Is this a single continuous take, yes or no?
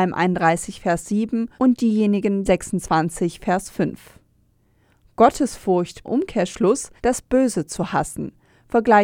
no